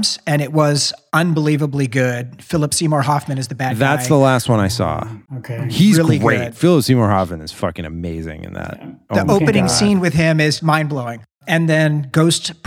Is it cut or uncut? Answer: cut